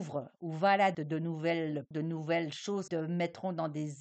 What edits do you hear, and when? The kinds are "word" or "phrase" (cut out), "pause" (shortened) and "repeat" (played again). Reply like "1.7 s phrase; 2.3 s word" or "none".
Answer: 0.9 s word; 1.9 s word; 2.9 s word